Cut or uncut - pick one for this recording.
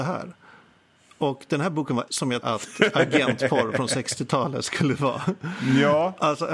cut